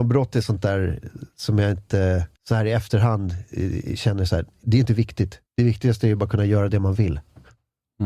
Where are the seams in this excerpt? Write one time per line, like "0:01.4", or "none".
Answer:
0:02.4
0:05.5